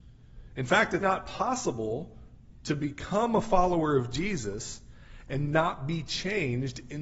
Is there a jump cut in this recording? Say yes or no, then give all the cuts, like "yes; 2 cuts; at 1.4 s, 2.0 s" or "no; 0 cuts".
yes; 1 cut; at 1.0 s